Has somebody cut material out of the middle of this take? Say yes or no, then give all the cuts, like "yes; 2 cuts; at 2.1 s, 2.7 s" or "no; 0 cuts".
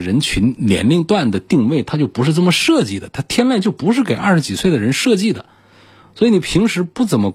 no; 0 cuts